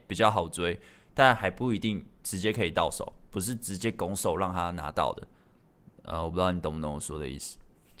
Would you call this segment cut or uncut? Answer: uncut